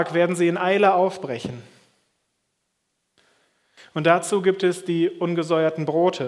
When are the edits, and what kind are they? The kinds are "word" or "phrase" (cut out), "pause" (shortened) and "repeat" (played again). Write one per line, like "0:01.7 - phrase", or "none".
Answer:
none